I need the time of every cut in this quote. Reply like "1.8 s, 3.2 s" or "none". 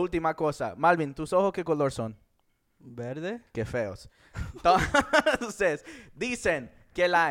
none